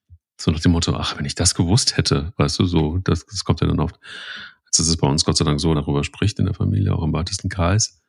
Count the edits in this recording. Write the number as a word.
one